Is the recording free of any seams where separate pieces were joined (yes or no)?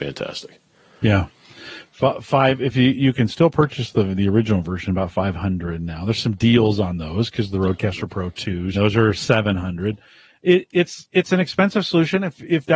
no